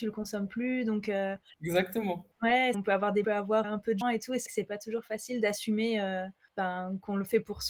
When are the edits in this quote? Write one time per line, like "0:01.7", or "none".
0:02.7
0:03.2
0:03.6
0:04.0
0:04.5